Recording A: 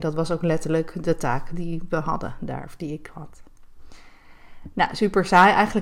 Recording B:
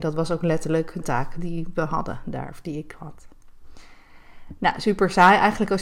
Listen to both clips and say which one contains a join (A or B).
B